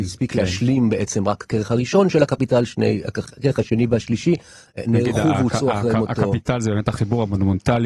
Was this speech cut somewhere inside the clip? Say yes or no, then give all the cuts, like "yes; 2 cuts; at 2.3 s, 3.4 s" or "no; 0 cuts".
no; 0 cuts